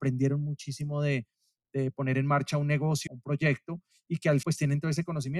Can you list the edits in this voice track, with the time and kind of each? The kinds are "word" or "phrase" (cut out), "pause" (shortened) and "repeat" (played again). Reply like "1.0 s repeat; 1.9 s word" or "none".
3.1 s word; 4.4 s word

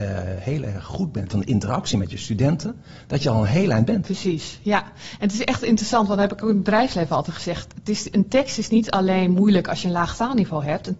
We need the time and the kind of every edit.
1.3 s phrase

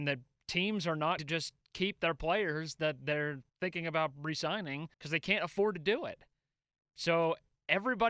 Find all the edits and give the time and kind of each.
1.2 s word; 3.5 s pause; 4.9 s pause

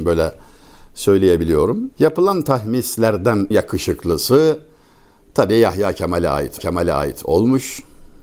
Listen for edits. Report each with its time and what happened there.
1.9 s pause; 3.5 s word; 6.6 s repeat

